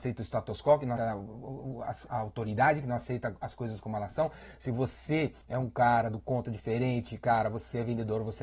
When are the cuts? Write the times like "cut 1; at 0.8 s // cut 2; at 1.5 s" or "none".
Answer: cut 1; at 1.0 s // cut 2; at 2.1 s // cut 3; at 5.4 s